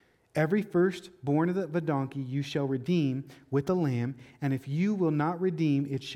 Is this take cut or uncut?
uncut